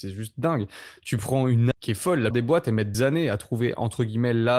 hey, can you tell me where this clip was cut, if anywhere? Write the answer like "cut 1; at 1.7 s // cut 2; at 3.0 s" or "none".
cut 1; at 1.7 s // cut 2; at 2.3 s // cut 3; at 2.9 s